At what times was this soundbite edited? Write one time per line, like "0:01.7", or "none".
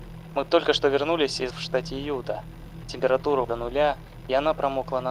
0:01.5
0:03.4